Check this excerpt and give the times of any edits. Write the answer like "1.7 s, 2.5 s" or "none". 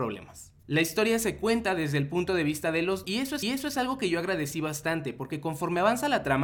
3.0 s, 3.4 s